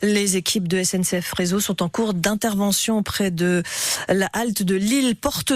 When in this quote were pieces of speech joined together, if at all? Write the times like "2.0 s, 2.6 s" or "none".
none